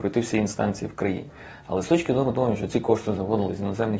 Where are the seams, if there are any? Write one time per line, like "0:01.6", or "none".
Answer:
none